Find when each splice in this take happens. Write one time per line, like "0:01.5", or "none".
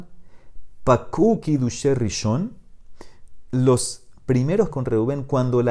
0:04.7